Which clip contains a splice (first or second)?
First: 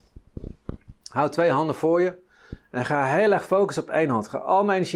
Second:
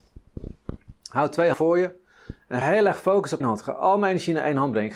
second